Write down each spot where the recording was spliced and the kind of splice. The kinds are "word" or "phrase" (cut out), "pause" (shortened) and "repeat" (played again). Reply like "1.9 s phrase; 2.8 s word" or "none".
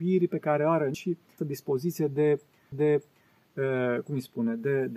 0.9 s word; 1.4 s word; 2.7 s repeat